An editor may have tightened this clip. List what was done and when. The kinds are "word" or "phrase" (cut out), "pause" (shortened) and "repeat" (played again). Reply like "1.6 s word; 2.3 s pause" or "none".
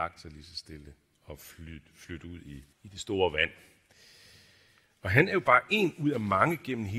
2.7 s pause